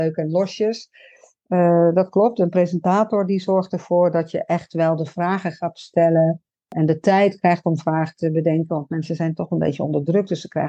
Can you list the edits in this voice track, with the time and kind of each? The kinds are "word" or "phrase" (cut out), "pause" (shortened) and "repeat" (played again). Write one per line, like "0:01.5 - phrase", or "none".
none

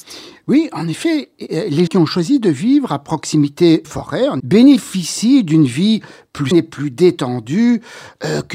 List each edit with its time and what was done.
0:01.9 - word
0:03.8 - word
0:04.4 - word
0:06.5 - word

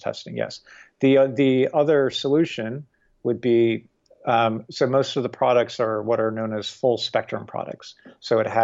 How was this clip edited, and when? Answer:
none

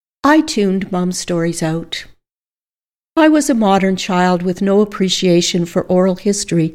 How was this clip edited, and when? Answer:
none

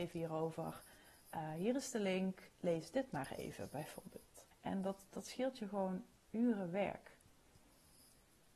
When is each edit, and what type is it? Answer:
0:02.5 - pause
0:04.5 - pause

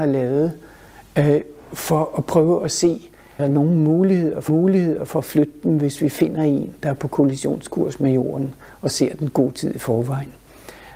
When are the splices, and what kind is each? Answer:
0:03.4 - word
0:04.5 - repeat

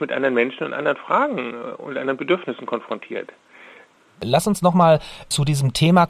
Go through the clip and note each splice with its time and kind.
none

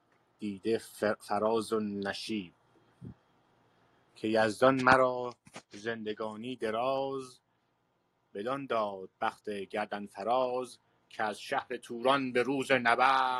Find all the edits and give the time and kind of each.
0:09.2 - word

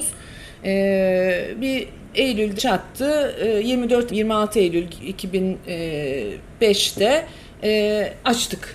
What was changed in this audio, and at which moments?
0:02.1 - word
0:02.6 - word
0:04.1 - word

